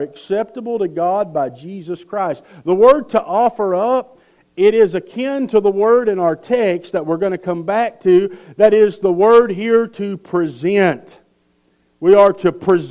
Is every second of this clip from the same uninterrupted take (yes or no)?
yes